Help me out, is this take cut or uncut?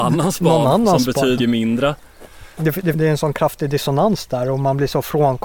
cut